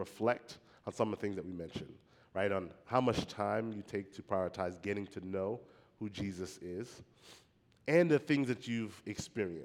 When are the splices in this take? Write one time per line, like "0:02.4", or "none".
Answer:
none